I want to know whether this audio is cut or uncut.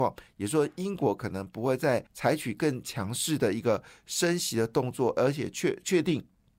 cut